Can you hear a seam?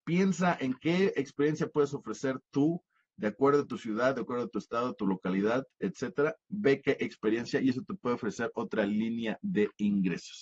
no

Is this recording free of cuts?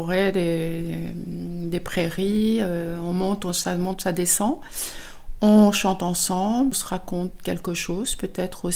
no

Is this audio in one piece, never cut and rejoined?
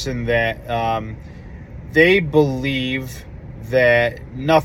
yes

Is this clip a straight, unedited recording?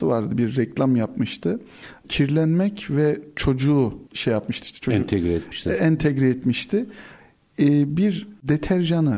no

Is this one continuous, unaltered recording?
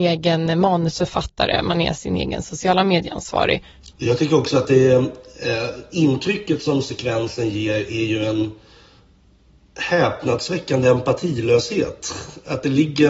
no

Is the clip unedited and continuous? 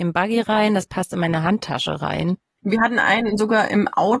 yes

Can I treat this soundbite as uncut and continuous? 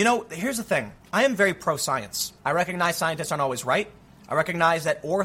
no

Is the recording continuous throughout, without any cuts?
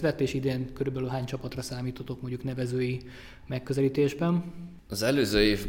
yes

